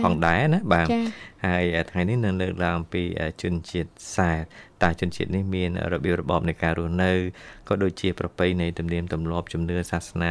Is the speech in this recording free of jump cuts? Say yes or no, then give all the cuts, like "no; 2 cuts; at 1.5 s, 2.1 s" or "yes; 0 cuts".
yes; 0 cuts